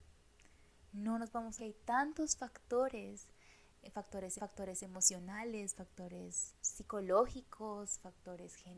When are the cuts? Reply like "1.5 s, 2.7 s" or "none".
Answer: 1.6 s, 4.4 s, 6.6 s